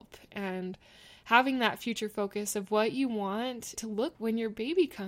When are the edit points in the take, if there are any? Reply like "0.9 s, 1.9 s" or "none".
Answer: 3.7 s, 4.1 s